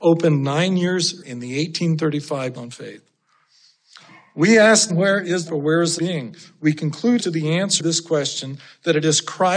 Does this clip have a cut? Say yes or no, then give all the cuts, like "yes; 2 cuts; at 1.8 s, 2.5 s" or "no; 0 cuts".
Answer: yes; 7 cuts; at 1.2 s, 2.6 s, 4.9 s, 5.5 s, 6.0 s, 7.2 s, 7.8 s